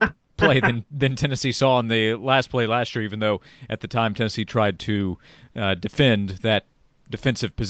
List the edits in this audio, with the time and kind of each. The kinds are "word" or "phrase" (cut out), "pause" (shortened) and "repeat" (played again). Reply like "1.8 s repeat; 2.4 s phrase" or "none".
none